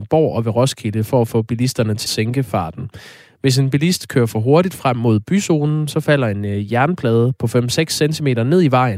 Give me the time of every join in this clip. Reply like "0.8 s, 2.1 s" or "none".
2.1 s